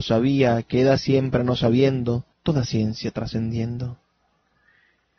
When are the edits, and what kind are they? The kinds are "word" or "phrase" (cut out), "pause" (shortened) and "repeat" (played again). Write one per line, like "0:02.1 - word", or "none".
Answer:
0:02.3 - pause